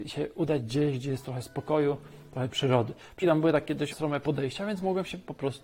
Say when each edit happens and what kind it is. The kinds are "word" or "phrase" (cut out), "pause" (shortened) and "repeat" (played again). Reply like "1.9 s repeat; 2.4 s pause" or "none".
1.2 s word; 3.2 s word; 3.9 s word